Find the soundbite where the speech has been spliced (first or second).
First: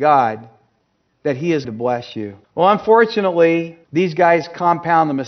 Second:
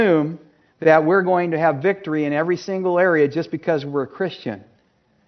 first